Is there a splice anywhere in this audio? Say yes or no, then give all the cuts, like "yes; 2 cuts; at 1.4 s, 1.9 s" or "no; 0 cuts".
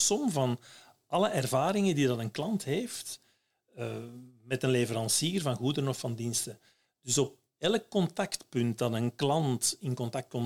no; 0 cuts